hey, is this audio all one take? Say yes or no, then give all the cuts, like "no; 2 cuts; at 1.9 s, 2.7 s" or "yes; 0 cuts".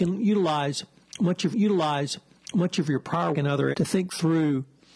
no; 3 cuts; at 1.5 s, 3.3 s, 3.7 s